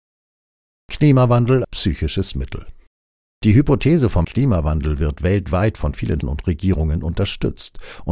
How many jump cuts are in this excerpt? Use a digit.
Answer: 4